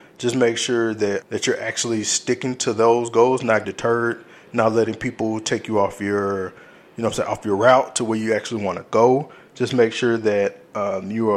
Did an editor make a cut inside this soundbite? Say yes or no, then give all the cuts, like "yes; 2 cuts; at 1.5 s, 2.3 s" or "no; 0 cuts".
yes; 2 cuts; at 1.2 s, 3.6 s